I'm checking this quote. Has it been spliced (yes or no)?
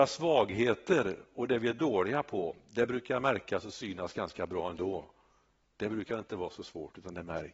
no